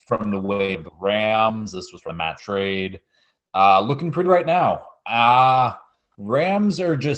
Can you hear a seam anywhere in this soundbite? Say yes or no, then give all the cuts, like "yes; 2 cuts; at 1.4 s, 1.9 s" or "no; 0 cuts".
yes; 2 cuts; at 2.4 s, 4.2 s